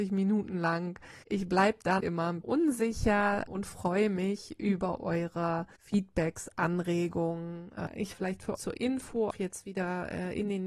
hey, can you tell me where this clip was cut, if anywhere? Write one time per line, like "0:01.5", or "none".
0:01.2
0:02.0
0:02.4
0:03.5
0:05.8
0:08.1
0:08.6
0:09.3